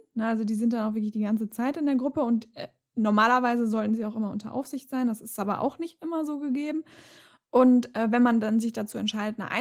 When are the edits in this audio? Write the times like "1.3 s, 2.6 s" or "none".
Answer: none